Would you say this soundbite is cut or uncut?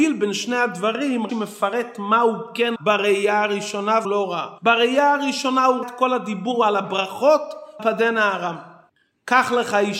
cut